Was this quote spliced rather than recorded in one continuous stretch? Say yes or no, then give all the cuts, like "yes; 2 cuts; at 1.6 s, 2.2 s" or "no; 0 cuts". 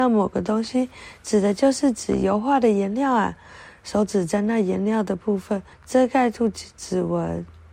yes; 1 cut; at 5.7 s